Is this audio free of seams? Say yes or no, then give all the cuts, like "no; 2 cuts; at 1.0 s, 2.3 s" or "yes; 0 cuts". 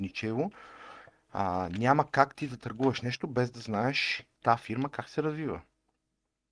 no; 1 cut; at 4.3 s